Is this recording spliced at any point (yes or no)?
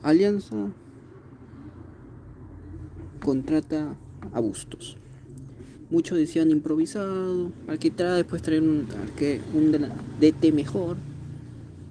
no